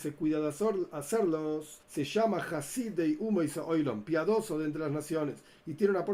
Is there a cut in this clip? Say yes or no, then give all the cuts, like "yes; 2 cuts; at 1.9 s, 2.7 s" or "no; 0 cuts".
yes; 1 cut; at 1.8 s